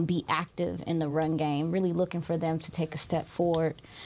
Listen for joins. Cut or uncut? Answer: uncut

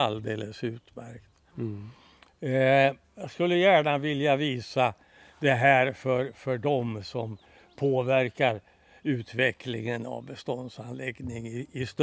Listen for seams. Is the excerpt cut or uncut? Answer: uncut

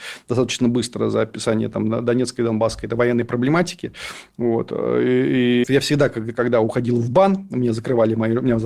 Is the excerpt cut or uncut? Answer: cut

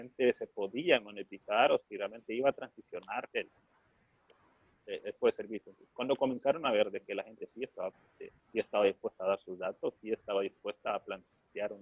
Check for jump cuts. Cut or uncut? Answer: cut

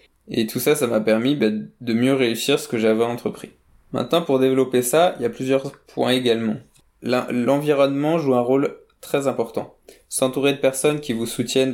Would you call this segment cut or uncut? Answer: uncut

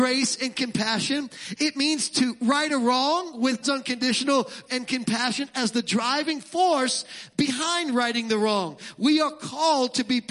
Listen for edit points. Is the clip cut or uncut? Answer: cut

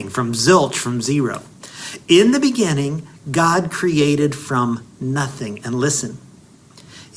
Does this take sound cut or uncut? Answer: uncut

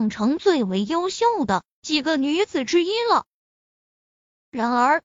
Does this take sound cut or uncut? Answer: uncut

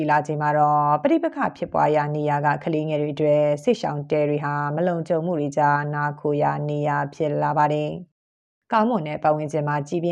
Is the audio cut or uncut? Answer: uncut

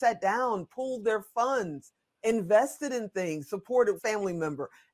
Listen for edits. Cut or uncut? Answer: cut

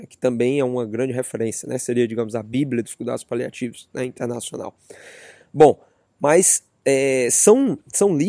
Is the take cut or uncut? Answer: uncut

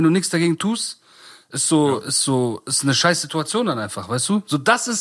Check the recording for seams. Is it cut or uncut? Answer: uncut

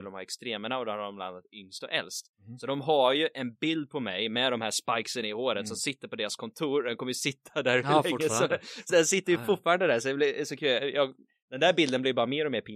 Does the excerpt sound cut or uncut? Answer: cut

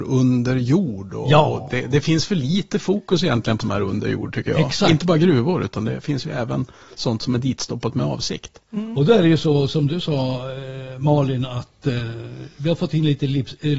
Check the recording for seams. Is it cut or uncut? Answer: cut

